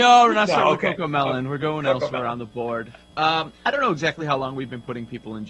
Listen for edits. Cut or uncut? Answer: uncut